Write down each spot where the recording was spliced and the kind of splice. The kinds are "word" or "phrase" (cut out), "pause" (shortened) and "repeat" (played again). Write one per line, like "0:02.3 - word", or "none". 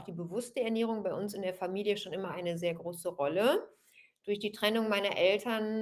none